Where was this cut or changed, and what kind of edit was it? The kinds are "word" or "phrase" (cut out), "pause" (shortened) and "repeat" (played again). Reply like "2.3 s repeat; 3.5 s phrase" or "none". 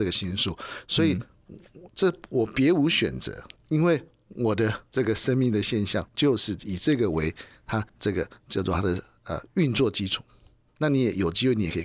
3.6 s pause; 4.9 s pause; 6.1 s pause; 7.9 s pause

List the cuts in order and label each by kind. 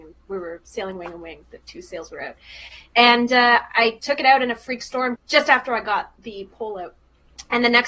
5.2 s word

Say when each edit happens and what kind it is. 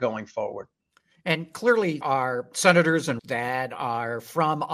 2.0 s word; 3.2 s word

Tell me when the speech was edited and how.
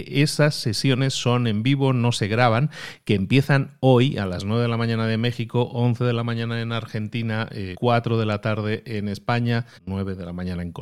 7.7 s word; 9.7 s pause

